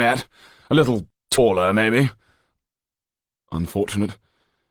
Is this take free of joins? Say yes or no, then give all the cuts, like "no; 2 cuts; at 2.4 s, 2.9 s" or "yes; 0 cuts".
yes; 0 cuts